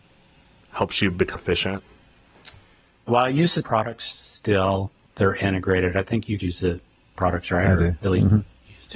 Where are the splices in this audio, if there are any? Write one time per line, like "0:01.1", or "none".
0:01.4
0:03.6
0:06.4
0:07.2